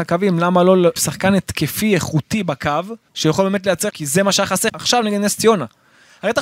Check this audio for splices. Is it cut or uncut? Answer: cut